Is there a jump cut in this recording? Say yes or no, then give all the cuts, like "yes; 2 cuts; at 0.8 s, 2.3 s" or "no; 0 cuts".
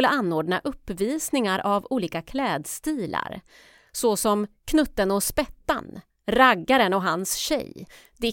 no; 0 cuts